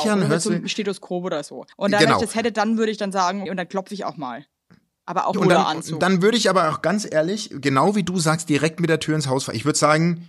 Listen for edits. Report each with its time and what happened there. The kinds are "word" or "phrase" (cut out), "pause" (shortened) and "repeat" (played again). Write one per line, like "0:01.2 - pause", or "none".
0:01.7 - pause
0:03.5 - word
0:05.3 - phrase

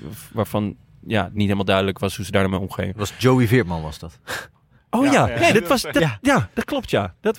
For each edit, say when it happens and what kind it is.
none

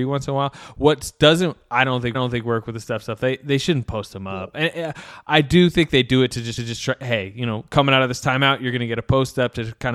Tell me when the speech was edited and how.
0:02.1 - repeat
0:06.6 - repeat

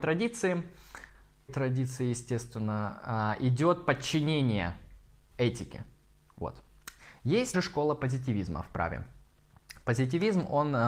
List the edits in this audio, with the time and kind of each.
0:01.5 - word
0:05.3 - word
0:07.5 - word

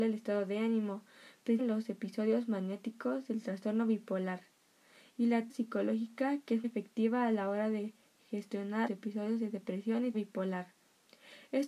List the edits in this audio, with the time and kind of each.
0:01.6 - word
0:05.5 - word
0:06.6 - word
0:08.9 - word
0:10.1 - word

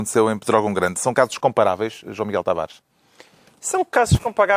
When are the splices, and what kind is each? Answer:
none

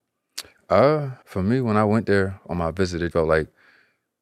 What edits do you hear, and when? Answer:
0:01.2 - pause
0:03.1 - word

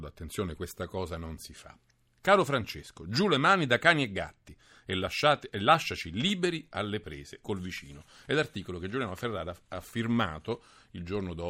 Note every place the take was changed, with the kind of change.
none

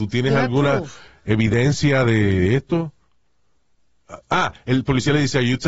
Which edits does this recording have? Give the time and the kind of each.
none

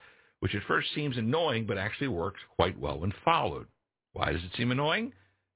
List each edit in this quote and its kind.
none

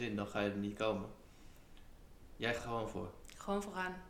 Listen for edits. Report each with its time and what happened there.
0:02.6 - word

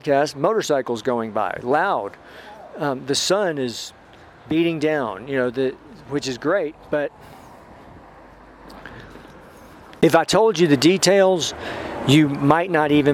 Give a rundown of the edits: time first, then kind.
none

